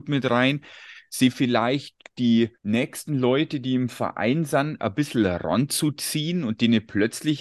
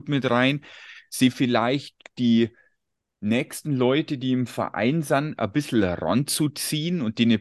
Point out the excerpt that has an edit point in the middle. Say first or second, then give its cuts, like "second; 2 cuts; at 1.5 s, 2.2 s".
first; 1 cut; at 2.5 s